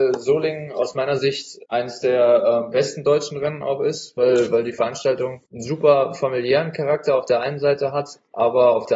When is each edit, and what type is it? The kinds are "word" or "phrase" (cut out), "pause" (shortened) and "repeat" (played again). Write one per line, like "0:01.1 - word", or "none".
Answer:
0:01.6 - pause
0:05.5 - pause